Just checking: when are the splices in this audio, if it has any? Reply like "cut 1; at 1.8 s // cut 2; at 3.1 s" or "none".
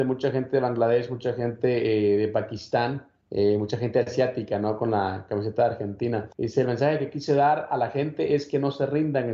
cut 1; at 3.2 s // cut 2; at 6.3 s